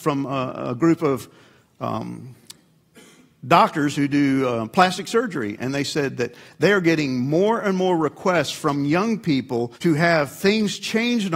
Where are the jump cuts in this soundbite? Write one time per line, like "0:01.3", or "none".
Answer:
0:09.7